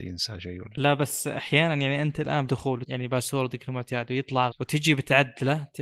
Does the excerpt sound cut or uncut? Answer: cut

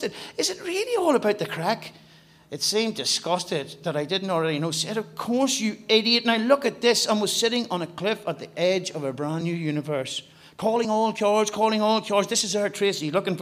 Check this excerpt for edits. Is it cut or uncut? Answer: uncut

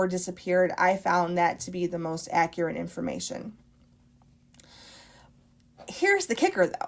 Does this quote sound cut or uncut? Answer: uncut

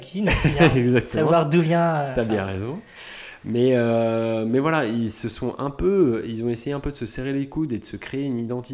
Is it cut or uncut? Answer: uncut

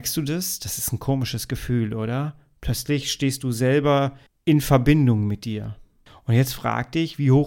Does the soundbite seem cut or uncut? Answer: cut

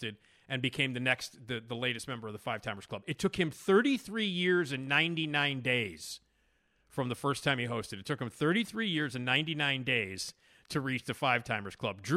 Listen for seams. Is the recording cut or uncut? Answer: uncut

